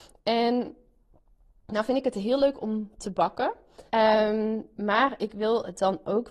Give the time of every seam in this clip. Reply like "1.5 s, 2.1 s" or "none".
3.9 s